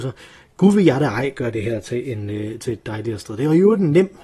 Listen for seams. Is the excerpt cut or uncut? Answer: uncut